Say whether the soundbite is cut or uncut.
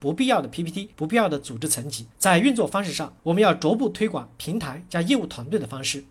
cut